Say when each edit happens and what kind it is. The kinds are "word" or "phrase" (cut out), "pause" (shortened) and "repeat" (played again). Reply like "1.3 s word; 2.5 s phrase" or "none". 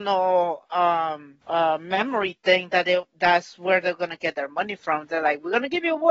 1.4 s pause